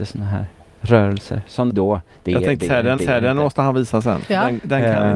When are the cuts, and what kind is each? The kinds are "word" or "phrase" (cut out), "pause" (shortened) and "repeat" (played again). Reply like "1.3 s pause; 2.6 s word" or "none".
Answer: 1.7 s phrase; 3.0 s repeat